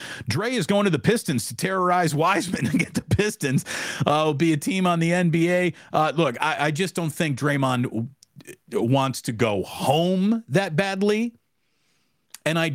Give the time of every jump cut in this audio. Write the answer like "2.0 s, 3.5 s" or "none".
none